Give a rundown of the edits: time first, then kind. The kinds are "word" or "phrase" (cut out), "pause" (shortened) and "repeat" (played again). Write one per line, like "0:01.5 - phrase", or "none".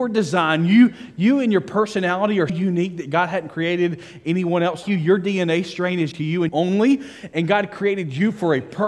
0:02.5 - word
0:04.8 - word
0:06.1 - word
0:06.5 - word